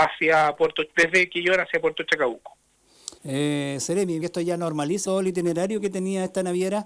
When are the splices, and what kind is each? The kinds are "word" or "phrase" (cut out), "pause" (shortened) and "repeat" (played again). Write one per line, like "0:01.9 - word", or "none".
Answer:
0:03.2 - pause
0:04.2 - phrase
0:05.0 - word